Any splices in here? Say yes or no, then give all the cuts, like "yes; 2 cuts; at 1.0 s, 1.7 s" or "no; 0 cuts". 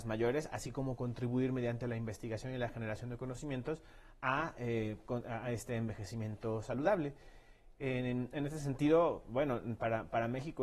no; 0 cuts